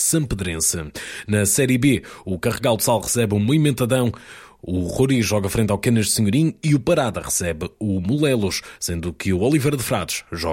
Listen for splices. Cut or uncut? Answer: uncut